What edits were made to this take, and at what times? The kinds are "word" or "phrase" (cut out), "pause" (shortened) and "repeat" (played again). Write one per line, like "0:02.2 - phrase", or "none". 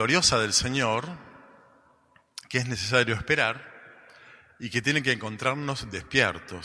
none